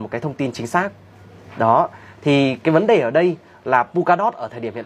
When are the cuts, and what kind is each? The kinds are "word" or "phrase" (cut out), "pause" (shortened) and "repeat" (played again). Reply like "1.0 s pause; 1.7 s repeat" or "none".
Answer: none

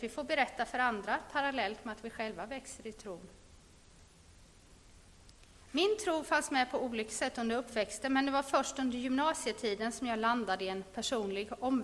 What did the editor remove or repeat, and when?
5.6 s pause

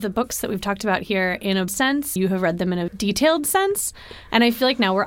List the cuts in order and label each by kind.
1.7 s word; 2.2 s word; 2.9 s word

